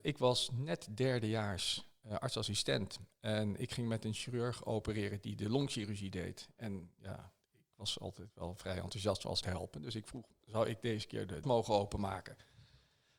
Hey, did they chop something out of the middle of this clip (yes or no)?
yes